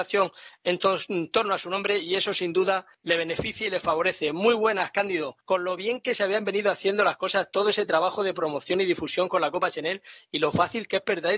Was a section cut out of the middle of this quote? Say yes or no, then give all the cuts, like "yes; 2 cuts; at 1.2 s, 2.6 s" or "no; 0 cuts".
yes; 2 cuts; at 2.9 s, 5.4 s